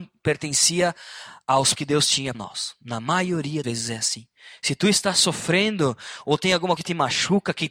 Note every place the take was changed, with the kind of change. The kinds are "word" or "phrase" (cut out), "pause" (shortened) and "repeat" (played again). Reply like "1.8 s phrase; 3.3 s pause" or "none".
1.8 s word; 2.3 s word; 3.6 s word; 6.8 s word